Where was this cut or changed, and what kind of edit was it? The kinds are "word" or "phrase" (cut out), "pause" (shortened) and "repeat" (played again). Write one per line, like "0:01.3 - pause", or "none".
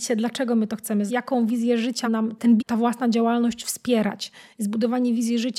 0:01.1 - word
0:02.0 - word
0:02.6 - word